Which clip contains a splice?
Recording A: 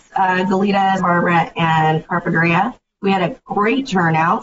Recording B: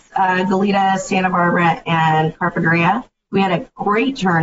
A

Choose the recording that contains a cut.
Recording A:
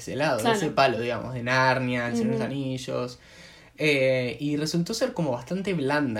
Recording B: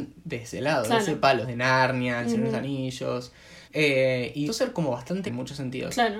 B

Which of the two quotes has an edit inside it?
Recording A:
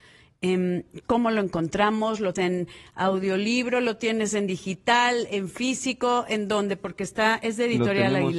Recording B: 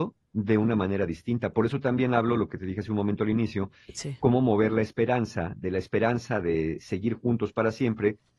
A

